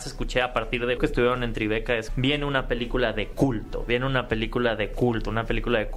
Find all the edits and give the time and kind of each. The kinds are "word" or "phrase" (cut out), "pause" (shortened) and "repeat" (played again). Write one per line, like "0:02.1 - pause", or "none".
0:01.0 - word
0:02.1 - word